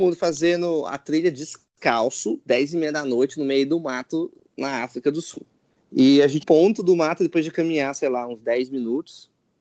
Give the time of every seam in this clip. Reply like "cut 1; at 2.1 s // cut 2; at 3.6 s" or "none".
cut 1; at 6.4 s